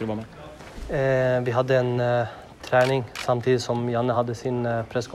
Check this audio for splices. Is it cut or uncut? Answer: uncut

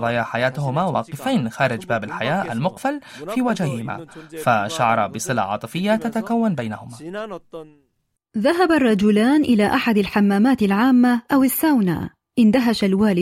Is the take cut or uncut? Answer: uncut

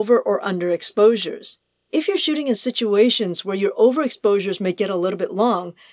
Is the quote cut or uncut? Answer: uncut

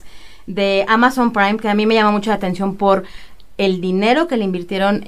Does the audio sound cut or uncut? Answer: uncut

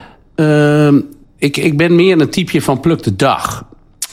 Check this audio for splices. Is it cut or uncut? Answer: cut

